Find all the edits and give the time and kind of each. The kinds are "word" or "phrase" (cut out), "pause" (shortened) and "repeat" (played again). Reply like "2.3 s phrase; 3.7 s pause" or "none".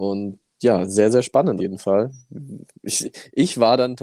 1.6 s word